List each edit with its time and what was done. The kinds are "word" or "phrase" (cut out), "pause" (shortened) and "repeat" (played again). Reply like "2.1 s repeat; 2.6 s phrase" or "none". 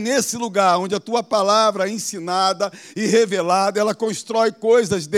none